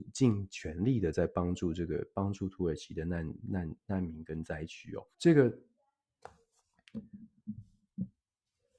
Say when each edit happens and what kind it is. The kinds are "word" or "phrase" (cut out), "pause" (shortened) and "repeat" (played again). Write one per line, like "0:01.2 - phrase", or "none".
0:05.1 - pause